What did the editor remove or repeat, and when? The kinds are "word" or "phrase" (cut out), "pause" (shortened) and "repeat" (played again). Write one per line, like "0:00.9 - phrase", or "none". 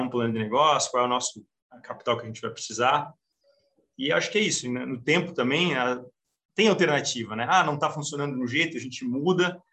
none